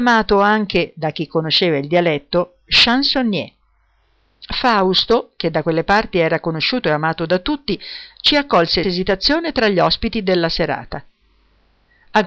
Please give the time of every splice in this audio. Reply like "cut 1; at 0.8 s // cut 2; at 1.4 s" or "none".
cut 1; at 8.8 s